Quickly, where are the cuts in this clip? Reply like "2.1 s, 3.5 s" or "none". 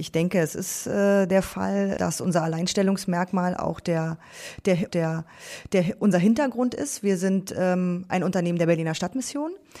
2.0 s, 4.9 s